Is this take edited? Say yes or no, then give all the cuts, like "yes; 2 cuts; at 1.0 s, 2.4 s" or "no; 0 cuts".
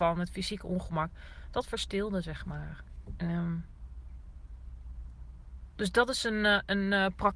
no; 0 cuts